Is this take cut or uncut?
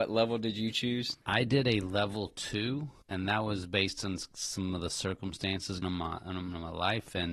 cut